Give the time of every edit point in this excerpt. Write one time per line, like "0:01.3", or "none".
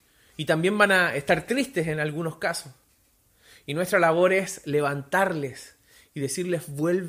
none